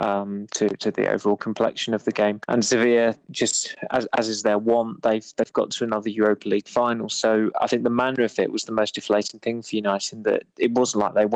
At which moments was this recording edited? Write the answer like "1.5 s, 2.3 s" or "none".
none